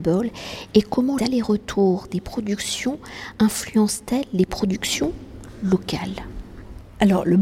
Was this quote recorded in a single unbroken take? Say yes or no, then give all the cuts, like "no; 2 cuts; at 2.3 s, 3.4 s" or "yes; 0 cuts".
no; 1 cut; at 1.2 s